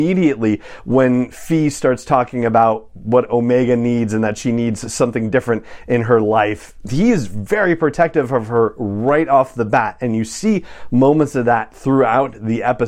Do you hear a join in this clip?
no; 0 cuts

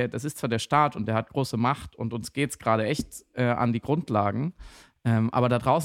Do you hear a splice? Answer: no; 0 cuts

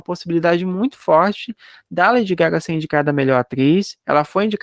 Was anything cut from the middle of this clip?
no; 0 cuts

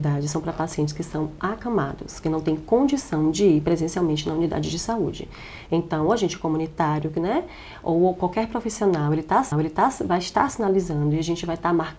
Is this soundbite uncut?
no; 1 cut; at 9.5 s

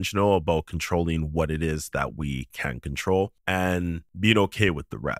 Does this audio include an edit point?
no; 0 cuts

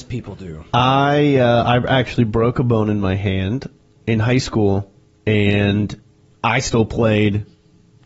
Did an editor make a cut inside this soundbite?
no; 0 cuts

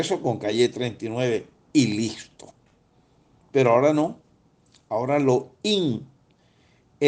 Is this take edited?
no; 0 cuts

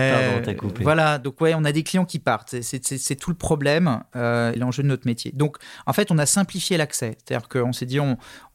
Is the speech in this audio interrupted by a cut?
yes; 1 cut; at 4.6 s

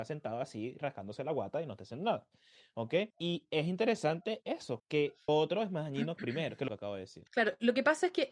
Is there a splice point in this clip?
yes; 6 cuts; at 3.1 s, 4.8 s, 5.3 s, 6.2 s, 6.7 s, 7.3 s

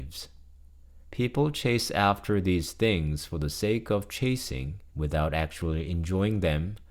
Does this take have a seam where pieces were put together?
yes; 2 cuts; at 1.0 s, 4.9 s

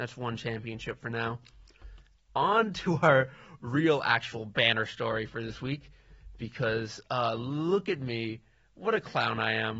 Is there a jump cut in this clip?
no; 0 cuts

